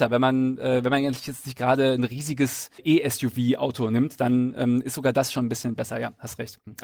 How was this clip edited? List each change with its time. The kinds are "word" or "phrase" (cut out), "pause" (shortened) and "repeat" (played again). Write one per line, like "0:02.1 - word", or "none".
none

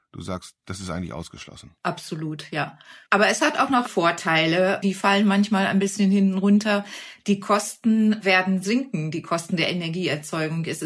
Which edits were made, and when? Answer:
0:03.0 - pause
0:03.8 - word

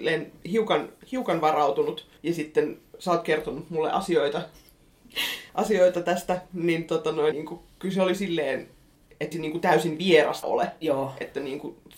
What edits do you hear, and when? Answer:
0:02.2 - pause
0:05.5 - pause
0:07.3 - phrase
0:09.3 - word
0:10.4 - word

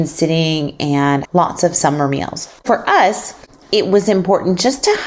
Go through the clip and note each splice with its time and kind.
0:01.2 - word
0:02.6 - pause

